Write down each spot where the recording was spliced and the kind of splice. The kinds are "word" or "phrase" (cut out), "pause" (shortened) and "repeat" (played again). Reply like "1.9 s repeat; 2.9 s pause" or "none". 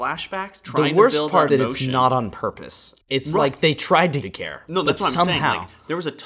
1.5 s phrase; 3.0 s pause; 4.2 s phrase